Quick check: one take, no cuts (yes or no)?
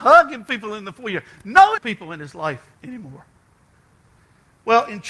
no